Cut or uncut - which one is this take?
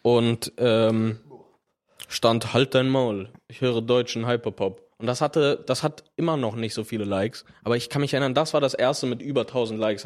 cut